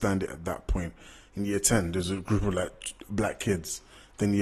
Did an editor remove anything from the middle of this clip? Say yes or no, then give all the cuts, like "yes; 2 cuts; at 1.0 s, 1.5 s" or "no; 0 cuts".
no; 0 cuts